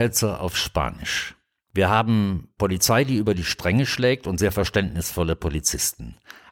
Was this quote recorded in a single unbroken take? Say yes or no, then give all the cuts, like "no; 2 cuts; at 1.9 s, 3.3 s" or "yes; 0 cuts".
yes; 0 cuts